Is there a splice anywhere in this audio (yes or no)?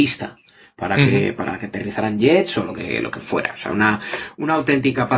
no